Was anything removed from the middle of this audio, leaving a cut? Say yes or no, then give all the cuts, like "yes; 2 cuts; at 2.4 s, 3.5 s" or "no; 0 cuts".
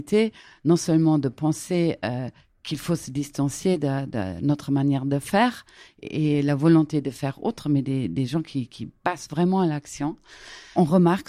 no; 0 cuts